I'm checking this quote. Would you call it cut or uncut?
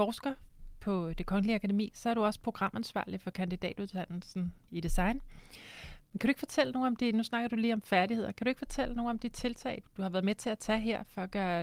cut